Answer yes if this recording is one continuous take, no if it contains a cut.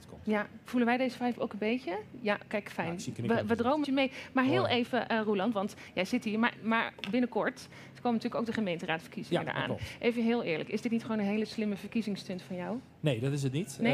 no